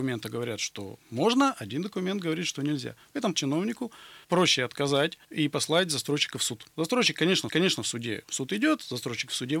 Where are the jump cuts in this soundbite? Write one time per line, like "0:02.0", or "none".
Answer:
0:03.3
0:04.2
0:05.2
0:06.7
0:07.5